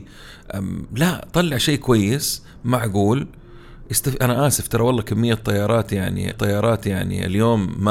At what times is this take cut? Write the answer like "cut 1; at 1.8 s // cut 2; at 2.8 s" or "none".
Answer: cut 1; at 6.3 s